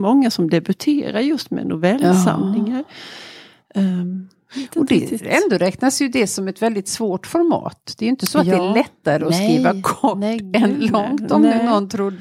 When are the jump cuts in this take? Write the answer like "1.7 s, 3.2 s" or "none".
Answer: none